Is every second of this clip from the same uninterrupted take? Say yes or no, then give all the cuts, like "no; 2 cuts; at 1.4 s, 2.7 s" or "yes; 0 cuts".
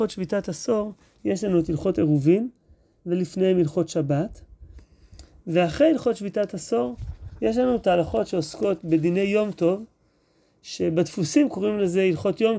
yes; 0 cuts